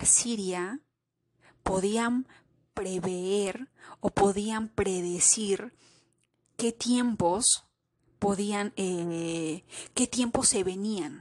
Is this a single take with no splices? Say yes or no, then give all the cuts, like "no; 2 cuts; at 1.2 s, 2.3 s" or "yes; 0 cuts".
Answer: yes; 0 cuts